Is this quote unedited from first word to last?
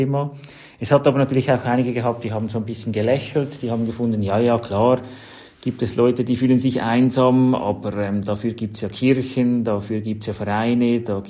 yes; 0 cuts

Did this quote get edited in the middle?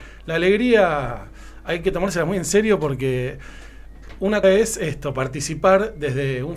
yes; 1 cut; at 4.4 s

